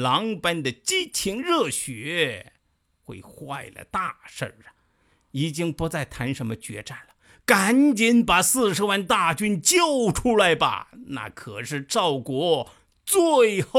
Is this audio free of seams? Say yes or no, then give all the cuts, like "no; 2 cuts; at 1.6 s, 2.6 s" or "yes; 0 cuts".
yes; 0 cuts